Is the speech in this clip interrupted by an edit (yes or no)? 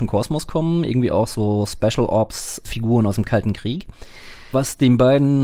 no